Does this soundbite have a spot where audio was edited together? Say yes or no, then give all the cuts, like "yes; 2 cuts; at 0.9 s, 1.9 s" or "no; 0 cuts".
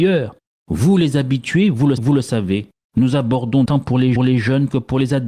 yes; 3 cuts; at 2.0 s, 3.7 s, 4.2 s